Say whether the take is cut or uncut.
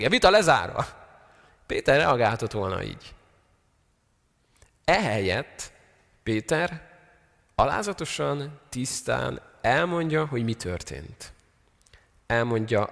uncut